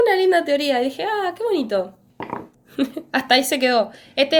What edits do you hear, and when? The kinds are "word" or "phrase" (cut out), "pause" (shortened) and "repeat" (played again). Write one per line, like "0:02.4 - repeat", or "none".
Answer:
none